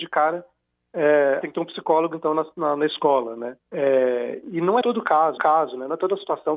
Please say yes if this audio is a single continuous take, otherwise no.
no